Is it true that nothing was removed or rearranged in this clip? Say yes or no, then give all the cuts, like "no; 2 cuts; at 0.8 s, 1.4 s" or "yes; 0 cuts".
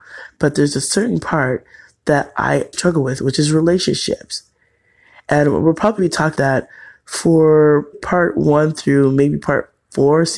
no; 4 cuts; at 2.7 s, 6.0 s, 6.3 s, 7.9 s